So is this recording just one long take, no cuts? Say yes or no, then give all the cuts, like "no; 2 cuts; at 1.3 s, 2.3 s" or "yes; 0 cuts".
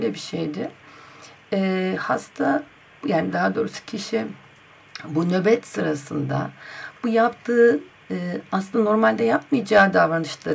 yes; 0 cuts